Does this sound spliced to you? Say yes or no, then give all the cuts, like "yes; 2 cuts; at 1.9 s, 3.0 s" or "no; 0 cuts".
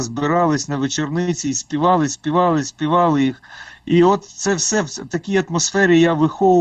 no; 0 cuts